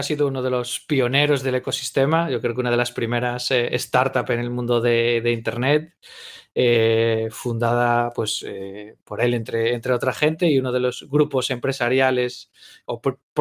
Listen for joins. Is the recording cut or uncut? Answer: uncut